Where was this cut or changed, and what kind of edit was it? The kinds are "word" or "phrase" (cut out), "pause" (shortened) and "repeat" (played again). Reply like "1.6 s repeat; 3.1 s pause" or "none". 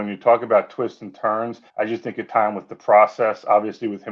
1.7 s pause; 2.3 s word